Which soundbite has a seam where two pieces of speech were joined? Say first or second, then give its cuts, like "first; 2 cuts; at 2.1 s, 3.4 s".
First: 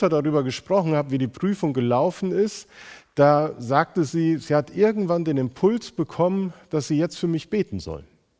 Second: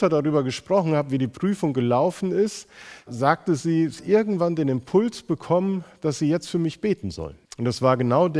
second; 3 cuts; at 3.1 s, 4.0 s, 7.4 s